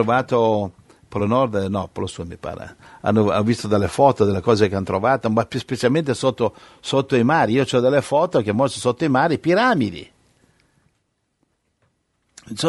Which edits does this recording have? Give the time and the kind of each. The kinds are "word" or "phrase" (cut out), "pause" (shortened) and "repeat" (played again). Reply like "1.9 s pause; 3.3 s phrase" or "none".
none